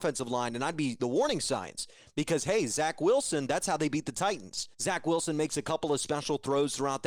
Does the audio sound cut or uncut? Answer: cut